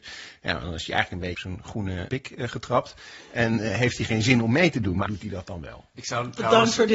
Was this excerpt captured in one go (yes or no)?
no